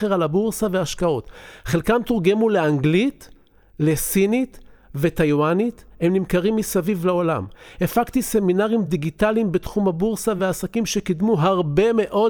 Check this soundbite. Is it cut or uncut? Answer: uncut